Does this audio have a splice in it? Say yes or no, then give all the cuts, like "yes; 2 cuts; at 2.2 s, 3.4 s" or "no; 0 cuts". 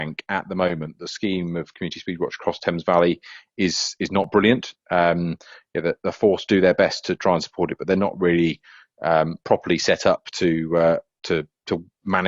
no; 0 cuts